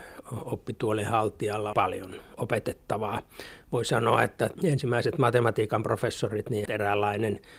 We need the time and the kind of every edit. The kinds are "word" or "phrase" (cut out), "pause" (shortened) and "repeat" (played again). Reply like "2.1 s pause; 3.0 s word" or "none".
1.7 s phrase; 4.5 s word; 6.7 s word

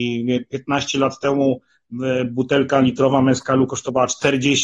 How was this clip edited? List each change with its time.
none

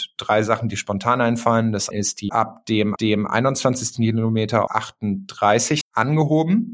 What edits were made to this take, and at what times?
1.9 s word; 2.3 s phrase; 3.0 s repeat; 4.7 s word; 5.8 s word

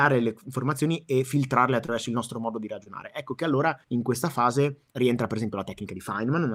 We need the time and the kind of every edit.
3.8 s pause; 4.9 s pause

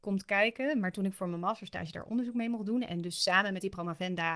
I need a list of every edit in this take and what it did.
none

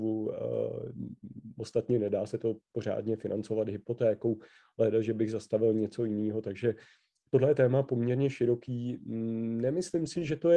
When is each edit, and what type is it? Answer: none

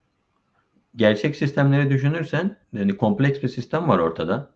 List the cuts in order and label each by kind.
2.6 s pause

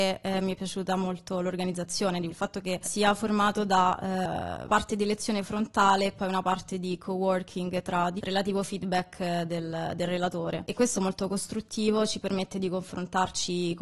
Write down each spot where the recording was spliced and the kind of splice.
2.3 s phrase; 2.8 s word; 4.7 s word; 8.2 s phrase; 10.9 s phrase

